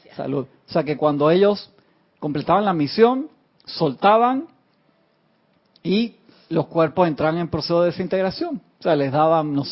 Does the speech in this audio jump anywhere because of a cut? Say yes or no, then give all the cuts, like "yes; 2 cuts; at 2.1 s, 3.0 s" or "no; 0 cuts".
no; 0 cuts